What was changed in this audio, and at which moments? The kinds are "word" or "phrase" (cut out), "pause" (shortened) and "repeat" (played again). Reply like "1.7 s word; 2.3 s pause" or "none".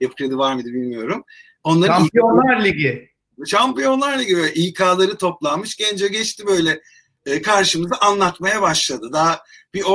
none